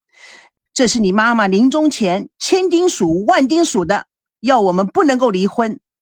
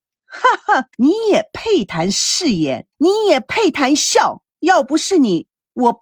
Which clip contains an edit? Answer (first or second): second